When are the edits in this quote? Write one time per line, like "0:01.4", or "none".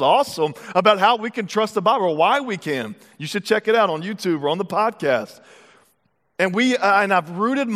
none